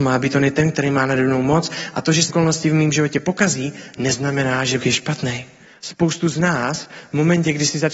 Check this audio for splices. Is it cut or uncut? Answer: cut